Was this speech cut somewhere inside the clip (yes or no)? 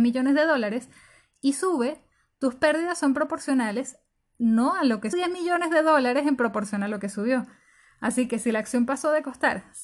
yes